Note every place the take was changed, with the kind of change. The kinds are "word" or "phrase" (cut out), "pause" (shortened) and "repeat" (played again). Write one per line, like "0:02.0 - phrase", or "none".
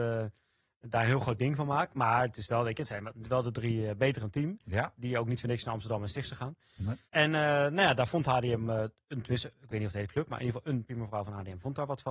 0:04.2 - word
0:07.1 - pause
0:10.9 - word